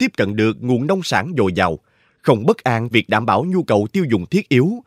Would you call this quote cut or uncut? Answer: cut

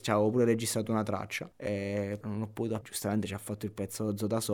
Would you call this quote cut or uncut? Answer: cut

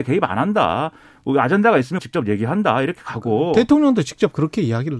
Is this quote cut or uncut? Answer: cut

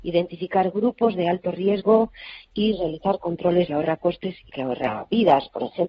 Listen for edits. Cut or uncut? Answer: cut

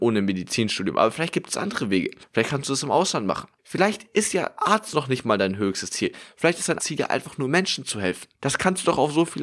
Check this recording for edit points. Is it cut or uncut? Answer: cut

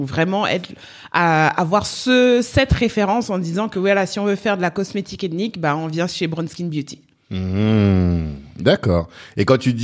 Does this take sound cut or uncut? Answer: uncut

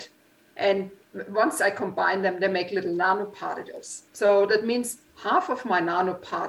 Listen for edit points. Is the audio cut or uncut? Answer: cut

